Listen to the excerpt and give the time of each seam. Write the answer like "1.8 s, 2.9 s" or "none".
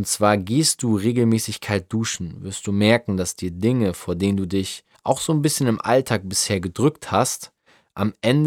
4.9 s